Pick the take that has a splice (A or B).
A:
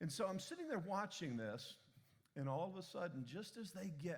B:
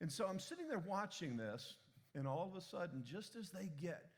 B